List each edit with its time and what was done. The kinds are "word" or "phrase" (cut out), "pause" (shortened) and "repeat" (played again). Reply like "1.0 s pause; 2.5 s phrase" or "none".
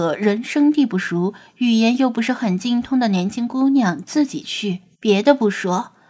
4.9 s pause